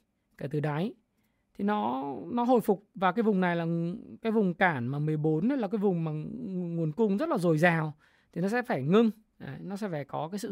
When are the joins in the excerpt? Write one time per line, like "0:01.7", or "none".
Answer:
none